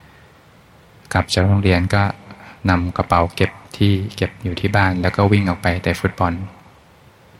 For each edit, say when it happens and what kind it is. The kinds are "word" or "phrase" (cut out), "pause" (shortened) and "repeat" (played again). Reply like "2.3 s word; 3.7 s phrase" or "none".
2.6 s pause; 3.6 s pause